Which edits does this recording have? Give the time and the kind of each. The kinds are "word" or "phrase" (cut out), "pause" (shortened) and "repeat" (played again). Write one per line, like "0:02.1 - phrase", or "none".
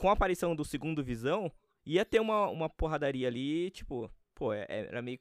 none

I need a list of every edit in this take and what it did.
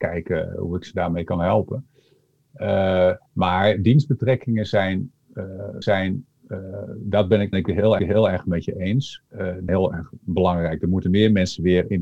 0:03.3 - pause
0:05.8 - repeat
0:07.5 - phrase
0:08.0 - repeat
0:09.3 - pause
0:09.7 - word

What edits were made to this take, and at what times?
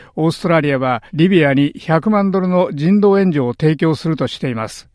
0:01.1 - pause

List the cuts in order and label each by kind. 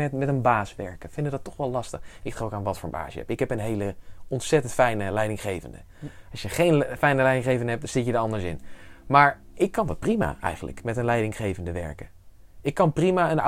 none

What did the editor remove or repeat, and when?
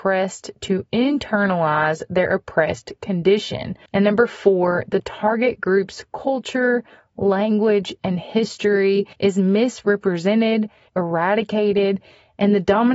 0:03.9 - pause
0:09.1 - pause
0:10.9 - word

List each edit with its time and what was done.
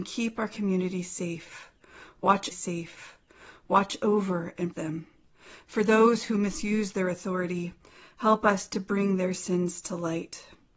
0:02.5 - repeat
0:04.7 - word

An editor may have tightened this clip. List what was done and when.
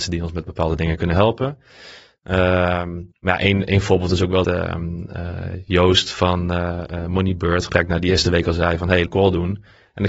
0:03.1 - pause
0:04.4 - word
0:07.7 - word
0:09.1 - phrase

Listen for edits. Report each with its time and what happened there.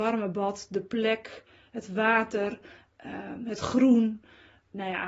none

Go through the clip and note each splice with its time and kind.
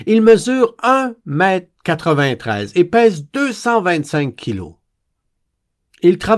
none

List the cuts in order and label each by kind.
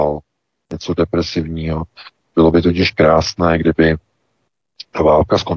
none

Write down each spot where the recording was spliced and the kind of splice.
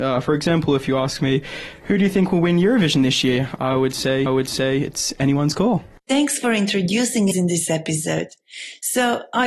0:04.3 - repeat
0:07.3 - phrase

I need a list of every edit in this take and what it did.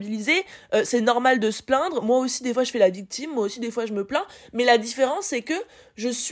none

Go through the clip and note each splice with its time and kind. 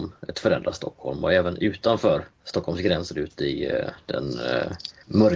none

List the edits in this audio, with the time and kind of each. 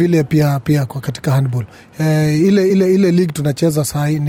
none

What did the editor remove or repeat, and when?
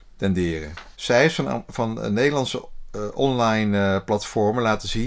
0:00.9 - pause

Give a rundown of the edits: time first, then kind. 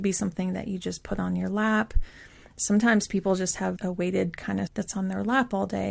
0:03.8 - word
0:04.7 - word

